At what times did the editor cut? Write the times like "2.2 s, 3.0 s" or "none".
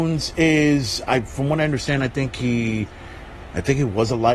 none